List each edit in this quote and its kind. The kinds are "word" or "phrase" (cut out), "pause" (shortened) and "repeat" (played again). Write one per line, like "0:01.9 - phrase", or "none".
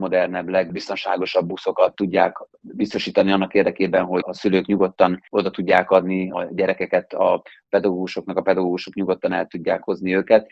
none